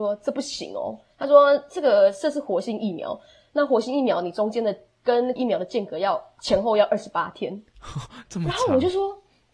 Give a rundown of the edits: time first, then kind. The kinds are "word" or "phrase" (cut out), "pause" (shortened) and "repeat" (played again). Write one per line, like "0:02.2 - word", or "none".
0:05.4 - word